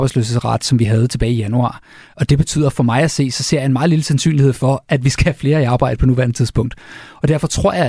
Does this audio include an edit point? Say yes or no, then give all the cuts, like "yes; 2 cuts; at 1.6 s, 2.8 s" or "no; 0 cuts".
no; 0 cuts